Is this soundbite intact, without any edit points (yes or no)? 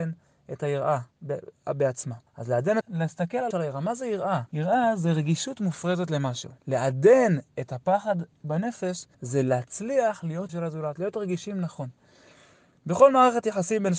no